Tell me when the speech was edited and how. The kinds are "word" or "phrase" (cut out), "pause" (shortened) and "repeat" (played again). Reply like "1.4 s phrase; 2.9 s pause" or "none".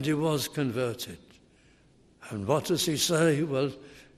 none